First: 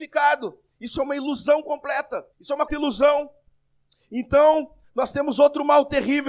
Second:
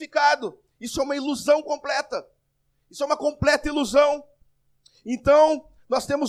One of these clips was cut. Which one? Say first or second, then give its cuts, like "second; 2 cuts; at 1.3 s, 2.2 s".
first; 2 cuts; at 2.3 s, 2.7 s